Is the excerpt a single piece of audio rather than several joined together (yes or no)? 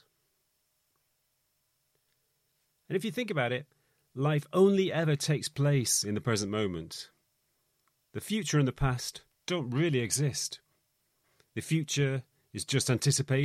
yes